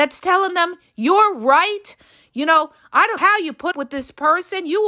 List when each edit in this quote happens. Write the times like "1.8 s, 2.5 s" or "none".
3.2 s, 3.7 s